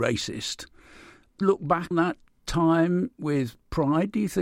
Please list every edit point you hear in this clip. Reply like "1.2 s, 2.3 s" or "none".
1.4 s, 1.9 s